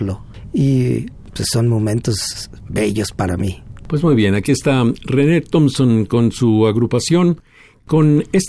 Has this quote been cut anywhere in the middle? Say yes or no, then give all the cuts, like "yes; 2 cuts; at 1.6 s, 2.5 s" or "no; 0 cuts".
no; 0 cuts